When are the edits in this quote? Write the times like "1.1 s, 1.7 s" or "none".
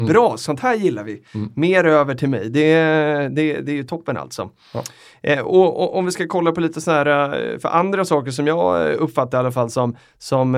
none